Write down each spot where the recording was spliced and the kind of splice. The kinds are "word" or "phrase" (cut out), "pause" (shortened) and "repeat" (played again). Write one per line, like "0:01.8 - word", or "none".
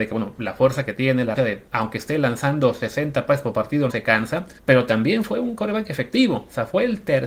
0:01.4 - word
0:01.7 - pause
0:03.9 - word
0:04.6 - pause